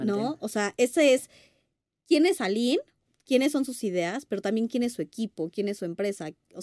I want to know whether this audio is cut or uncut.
uncut